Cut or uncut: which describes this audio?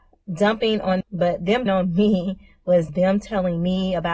cut